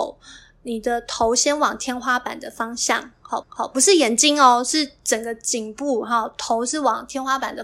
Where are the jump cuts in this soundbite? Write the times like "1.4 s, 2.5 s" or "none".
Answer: 3.4 s